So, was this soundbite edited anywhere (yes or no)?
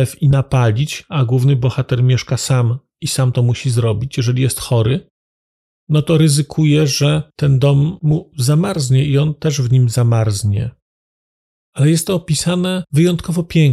no